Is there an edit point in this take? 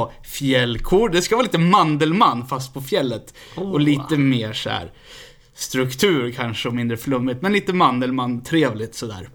no; 0 cuts

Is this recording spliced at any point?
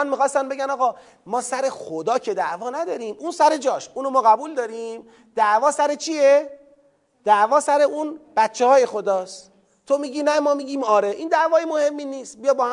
no; 0 cuts

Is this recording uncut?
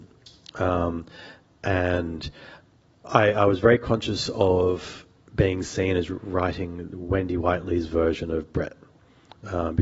yes; 0 cuts

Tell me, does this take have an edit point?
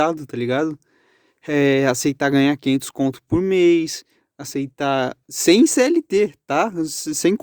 yes; 1 cut; at 5.2 s

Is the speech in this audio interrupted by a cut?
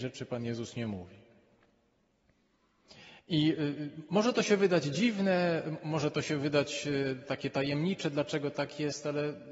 yes; 1 cut; at 3.2 s

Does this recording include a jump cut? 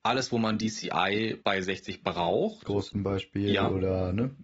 yes; 3 cuts; at 1.4 s, 2.0 s, 2.9 s

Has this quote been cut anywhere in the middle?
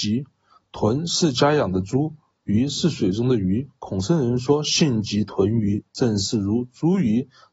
no; 0 cuts

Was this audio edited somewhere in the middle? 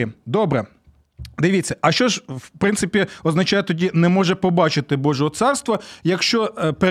no; 0 cuts

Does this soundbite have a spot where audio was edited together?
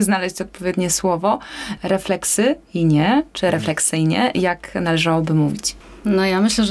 yes; 1 cut; at 2.6 s

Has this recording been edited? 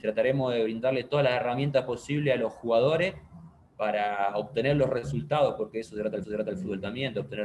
yes; 1 cut; at 6.2 s

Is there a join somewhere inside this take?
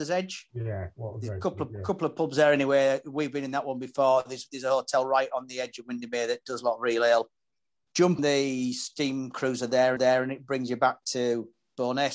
yes; 2 cuts; at 8.2 s, 10.0 s

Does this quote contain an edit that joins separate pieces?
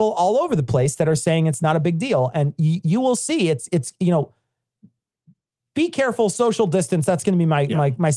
no; 0 cuts

